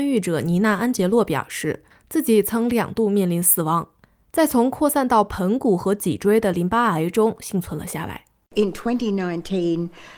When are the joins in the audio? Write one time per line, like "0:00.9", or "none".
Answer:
none